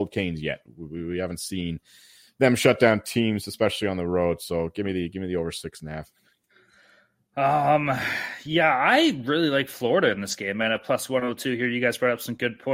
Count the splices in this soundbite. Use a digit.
0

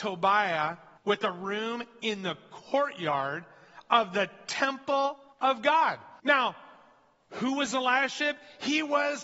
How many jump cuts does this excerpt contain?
3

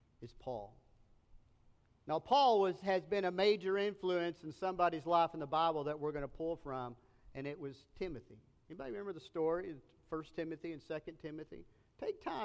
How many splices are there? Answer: 0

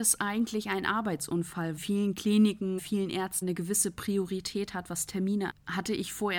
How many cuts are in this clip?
4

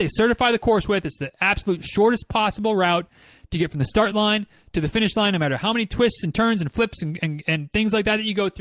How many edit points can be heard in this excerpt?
0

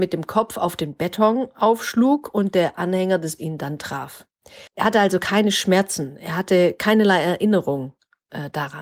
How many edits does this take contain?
2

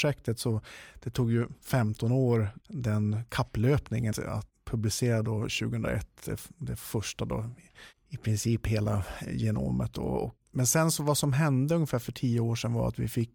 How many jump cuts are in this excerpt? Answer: 2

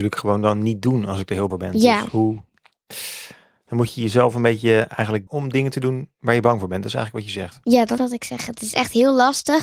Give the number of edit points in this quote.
3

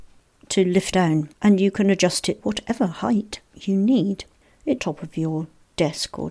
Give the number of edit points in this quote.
5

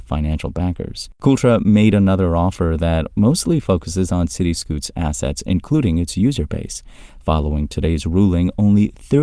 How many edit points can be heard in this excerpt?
1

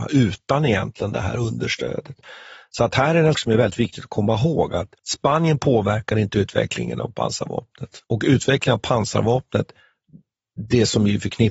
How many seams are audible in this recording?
3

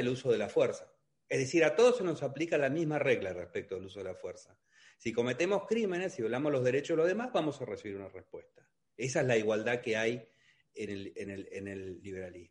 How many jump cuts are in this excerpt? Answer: 0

